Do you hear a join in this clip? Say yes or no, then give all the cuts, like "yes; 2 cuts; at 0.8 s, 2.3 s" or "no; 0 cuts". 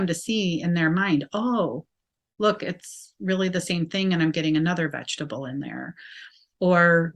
no; 0 cuts